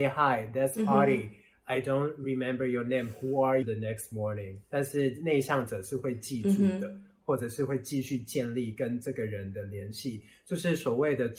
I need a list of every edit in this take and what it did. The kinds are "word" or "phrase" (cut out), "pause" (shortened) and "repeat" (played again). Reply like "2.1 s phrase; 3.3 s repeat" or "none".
3.6 s word; 4.6 s pause